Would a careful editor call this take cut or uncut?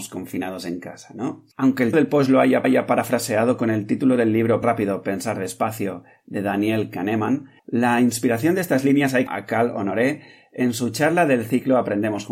cut